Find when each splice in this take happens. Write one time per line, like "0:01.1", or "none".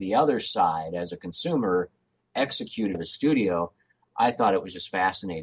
0:02.9